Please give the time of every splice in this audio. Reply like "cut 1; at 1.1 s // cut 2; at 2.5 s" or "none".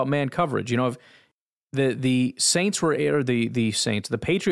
none